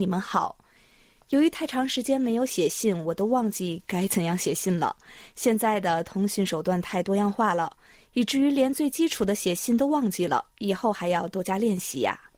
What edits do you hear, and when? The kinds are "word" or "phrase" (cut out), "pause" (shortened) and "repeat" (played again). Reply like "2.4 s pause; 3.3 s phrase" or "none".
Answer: 10.5 s pause